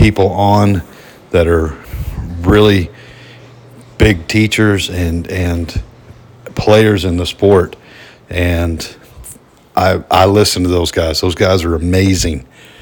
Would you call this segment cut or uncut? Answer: uncut